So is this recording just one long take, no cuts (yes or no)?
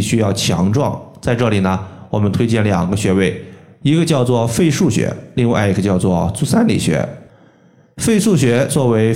yes